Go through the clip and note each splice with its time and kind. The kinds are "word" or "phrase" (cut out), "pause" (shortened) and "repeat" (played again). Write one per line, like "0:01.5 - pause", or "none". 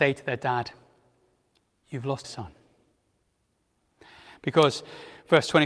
0:02.2 - word

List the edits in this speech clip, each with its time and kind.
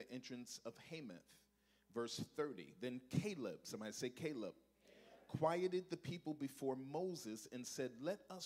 none

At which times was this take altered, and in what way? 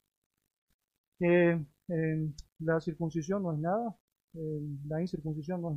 none

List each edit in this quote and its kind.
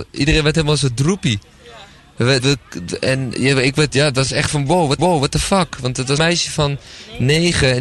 0:02.4 - word
0:04.5 - word
0:05.0 - repeat
0:06.2 - word

